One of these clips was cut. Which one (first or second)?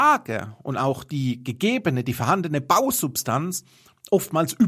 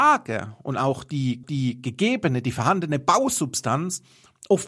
second